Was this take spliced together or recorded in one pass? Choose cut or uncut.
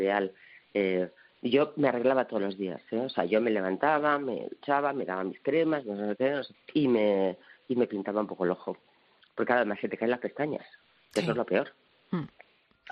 cut